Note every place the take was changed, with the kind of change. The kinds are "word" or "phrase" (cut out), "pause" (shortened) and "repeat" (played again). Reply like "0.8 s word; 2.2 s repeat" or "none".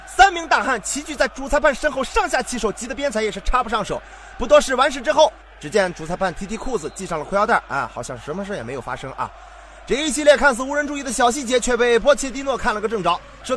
none